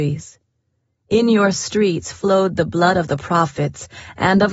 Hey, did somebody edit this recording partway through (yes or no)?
no